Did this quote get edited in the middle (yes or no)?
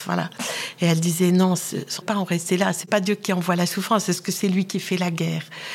yes